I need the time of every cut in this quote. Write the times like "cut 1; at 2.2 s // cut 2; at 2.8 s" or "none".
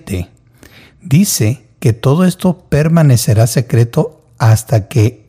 none